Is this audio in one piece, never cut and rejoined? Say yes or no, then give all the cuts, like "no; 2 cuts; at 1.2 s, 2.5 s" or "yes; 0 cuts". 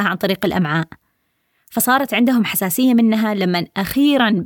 yes; 0 cuts